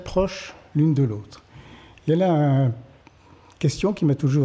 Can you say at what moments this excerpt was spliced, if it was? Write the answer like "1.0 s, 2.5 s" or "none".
none